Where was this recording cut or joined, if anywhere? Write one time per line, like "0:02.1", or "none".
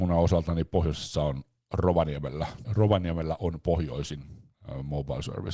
0:02.6